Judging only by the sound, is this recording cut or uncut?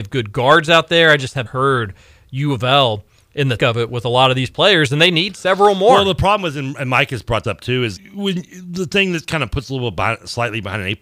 cut